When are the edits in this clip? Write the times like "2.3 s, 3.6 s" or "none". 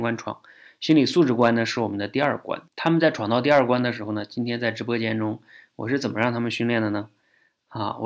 2.7 s

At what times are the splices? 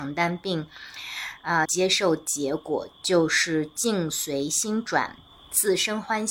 1.7 s

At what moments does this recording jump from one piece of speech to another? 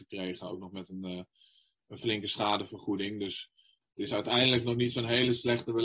none

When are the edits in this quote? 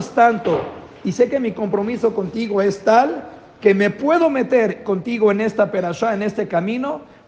none

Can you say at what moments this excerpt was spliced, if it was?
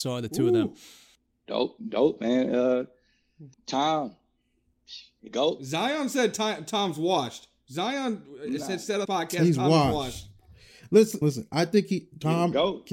3.5 s, 5.3 s, 9.0 s, 11.2 s

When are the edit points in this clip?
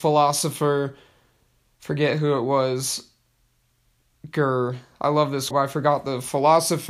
5.5 s

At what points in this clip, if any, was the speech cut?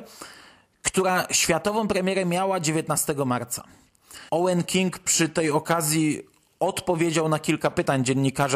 4.3 s

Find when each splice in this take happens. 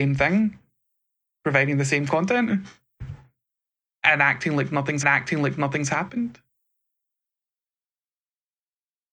5.0 s

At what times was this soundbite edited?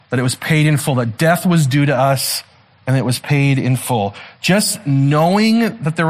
none

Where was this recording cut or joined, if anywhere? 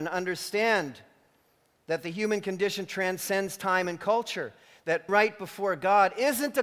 5.1 s

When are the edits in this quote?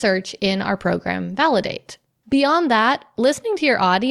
none

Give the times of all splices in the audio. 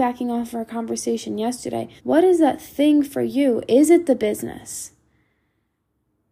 2.0 s

